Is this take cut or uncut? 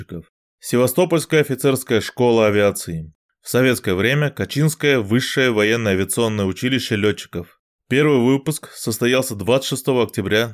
uncut